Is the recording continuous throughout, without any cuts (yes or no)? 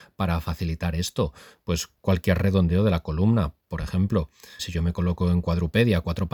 no